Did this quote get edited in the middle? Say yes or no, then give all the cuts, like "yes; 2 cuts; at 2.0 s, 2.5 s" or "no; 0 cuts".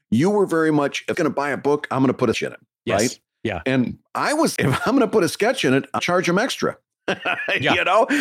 yes; 4 cuts; at 1.1 s, 2.3 s, 4.6 s, 6.0 s